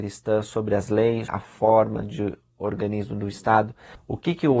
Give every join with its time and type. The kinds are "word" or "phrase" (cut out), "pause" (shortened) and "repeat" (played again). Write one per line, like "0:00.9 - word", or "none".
0:01.3 - word

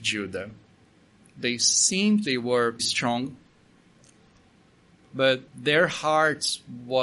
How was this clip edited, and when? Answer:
0:02.2 - phrase
0:02.8 - word
0:05.5 - pause

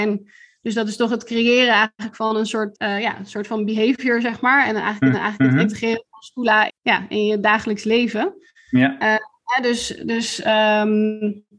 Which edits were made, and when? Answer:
0:02.7 - word
0:05.1 - repeat
0:06.7 - word

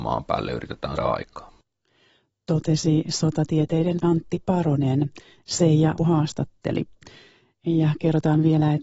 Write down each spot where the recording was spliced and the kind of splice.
0:01.0 - word
0:04.0 - word
0:06.0 - word

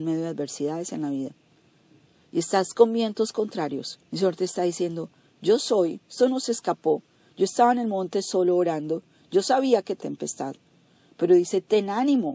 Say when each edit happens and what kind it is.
0:04.1 - pause
0:10.0 - phrase

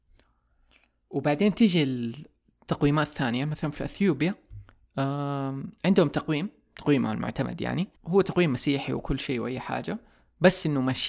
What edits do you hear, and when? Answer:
0:05.8 - pause
0:08.0 - pause

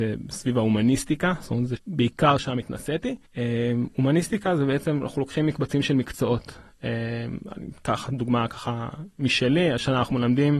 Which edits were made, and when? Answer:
0:01.8 - word
0:03.3 - pause

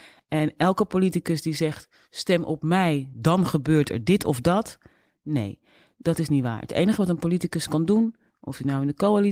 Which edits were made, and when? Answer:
none

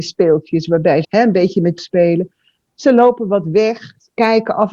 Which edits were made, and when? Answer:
0:01.0 - word
0:01.8 - word

